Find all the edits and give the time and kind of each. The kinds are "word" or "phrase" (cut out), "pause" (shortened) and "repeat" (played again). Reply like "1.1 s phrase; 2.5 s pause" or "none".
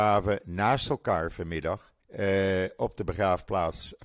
2.0 s pause